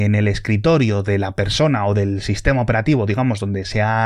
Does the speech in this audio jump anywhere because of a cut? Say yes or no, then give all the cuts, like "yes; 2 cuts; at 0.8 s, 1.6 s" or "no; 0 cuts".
no; 0 cuts